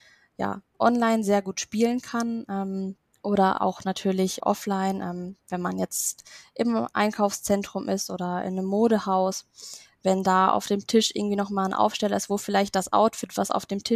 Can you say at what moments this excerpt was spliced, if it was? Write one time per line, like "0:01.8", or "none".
0:03.1
0:04.4